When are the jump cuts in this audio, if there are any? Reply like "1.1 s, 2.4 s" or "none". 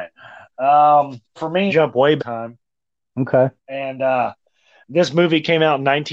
1.4 s, 1.7 s, 2.2 s, 3.6 s